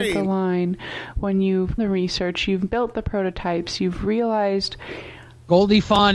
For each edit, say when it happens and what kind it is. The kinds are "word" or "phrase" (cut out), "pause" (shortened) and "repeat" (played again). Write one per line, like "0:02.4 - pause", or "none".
0:01.8 - word